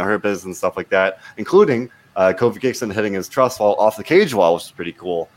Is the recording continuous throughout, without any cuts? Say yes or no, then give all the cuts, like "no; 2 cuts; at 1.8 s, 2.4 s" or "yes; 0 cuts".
yes; 0 cuts